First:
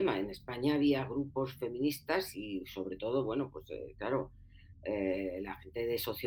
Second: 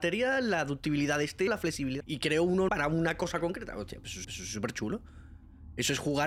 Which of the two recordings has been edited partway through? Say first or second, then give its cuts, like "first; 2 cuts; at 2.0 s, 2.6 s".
second; 4 cuts; at 1.5 s, 2.0 s, 2.7 s, 4.2 s